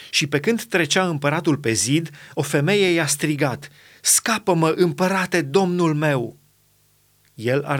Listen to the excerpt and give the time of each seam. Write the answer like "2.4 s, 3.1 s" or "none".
none